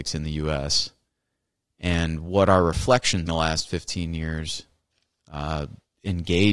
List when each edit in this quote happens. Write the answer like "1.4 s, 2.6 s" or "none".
3.3 s